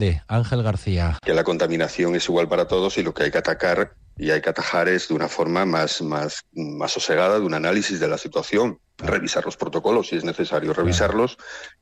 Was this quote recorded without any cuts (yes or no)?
yes